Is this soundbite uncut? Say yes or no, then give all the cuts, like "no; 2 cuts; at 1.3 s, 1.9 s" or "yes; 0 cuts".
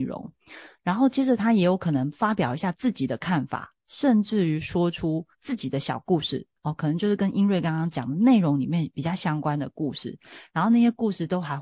no; 1 cut; at 5.3 s